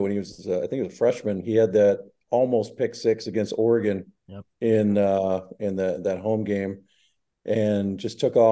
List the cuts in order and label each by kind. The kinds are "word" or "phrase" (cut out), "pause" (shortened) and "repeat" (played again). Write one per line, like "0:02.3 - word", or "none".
0:04.5 - pause